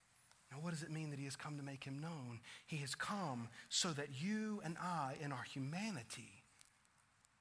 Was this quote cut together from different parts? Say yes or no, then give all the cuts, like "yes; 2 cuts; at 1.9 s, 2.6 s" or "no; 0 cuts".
no; 0 cuts